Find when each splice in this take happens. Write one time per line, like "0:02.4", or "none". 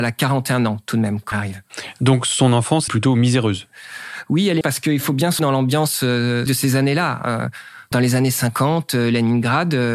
0:01.3
0:02.9
0:04.6
0:05.4
0:06.5
0:07.9